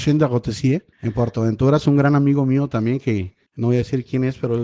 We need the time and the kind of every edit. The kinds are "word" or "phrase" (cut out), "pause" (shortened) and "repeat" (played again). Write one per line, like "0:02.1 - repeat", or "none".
0:00.9 - pause
0:03.5 - pause